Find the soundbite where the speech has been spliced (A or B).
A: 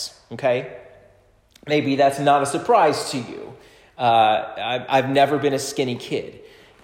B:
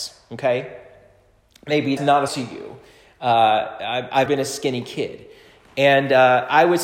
B